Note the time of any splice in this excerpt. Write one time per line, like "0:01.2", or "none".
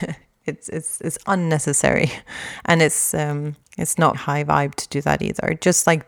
0:03.6
0:04.1